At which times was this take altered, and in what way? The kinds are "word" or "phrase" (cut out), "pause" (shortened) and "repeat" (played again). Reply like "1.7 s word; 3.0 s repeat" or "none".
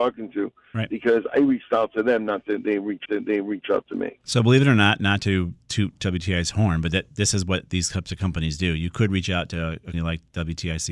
3.0 s repeat; 9.9 s word

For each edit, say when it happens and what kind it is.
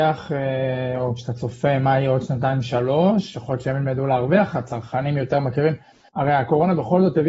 none

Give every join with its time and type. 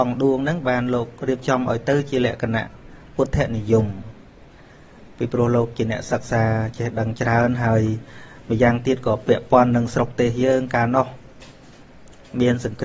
none

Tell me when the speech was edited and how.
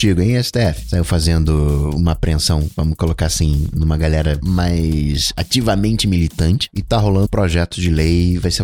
7.3 s word

